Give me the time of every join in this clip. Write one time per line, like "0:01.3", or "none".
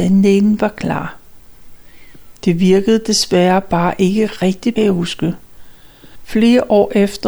0:02.3
0:04.8